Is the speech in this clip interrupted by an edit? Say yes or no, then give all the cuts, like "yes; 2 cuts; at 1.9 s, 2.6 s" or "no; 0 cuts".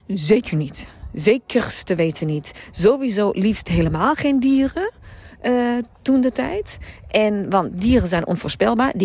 no; 0 cuts